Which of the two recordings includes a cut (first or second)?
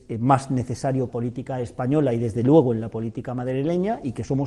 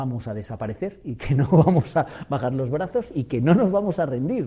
first